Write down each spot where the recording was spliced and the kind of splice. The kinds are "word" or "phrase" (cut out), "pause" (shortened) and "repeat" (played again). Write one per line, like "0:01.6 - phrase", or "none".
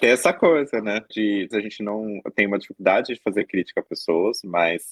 0:01.5 - word
0:03.9 - phrase